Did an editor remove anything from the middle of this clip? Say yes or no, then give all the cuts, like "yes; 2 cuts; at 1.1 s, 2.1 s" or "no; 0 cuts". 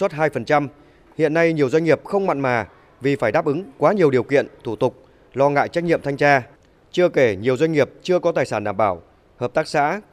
no; 0 cuts